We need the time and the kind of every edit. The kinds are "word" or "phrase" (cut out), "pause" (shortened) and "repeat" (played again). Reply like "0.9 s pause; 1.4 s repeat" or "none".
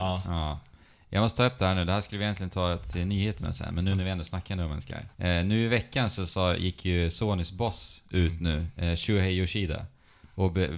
5.1 s pause